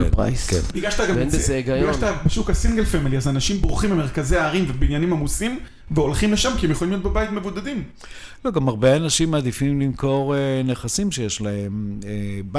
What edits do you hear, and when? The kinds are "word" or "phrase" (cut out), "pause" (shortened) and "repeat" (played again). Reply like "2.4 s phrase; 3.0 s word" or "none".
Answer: none